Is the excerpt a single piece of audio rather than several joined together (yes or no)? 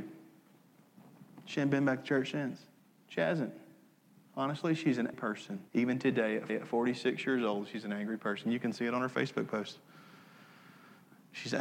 no